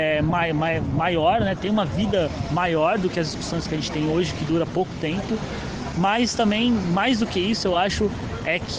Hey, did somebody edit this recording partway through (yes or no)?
no